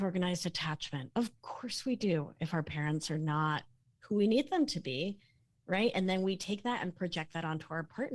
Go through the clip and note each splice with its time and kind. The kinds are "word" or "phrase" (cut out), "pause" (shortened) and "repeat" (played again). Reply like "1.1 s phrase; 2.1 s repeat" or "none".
none